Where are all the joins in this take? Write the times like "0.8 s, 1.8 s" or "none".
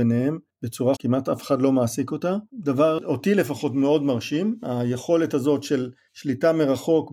0.9 s, 2.5 s